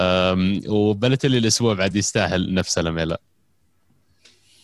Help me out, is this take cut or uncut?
uncut